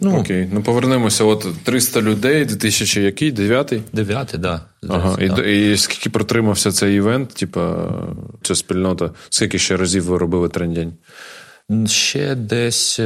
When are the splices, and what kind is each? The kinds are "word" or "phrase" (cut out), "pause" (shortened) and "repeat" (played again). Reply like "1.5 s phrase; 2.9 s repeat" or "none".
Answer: none